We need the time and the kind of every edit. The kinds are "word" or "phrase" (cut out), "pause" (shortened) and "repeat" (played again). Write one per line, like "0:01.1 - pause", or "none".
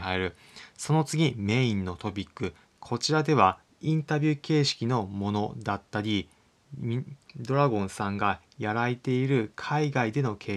0:03.6 - pause